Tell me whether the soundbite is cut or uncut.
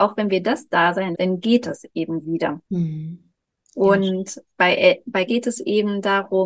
cut